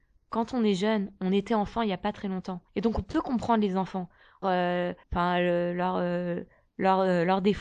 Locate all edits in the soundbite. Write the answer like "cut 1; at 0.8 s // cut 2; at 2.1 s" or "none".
cut 1; at 2.7 s // cut 2; at 4.4 s // cut 3; at 5.0 s